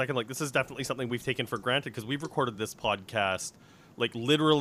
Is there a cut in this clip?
no; 0 cuts

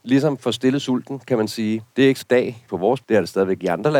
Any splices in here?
yes; 4 cuts; at 1.9 s, 2.2 s, 2.7 s, 3.0 s

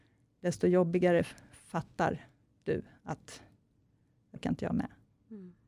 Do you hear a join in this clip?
yes; 1 cut; at 4.4 s

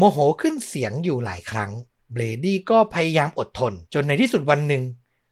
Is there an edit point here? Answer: yes; 2 cuts; at 2.0 s, 3.9 s

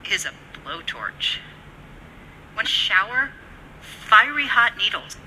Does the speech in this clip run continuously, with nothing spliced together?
no; 1 cut; at 2.6 s

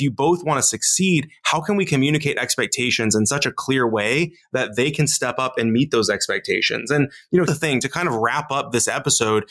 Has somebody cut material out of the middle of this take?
yes; 1 cut; at 7.5 s

